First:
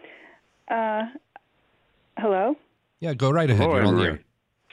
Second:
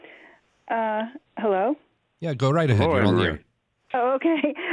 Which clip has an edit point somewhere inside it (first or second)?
second